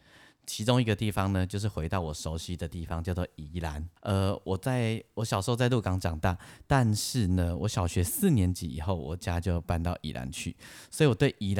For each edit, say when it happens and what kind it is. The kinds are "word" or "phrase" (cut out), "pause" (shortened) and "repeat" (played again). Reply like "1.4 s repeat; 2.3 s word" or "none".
4.0 s pause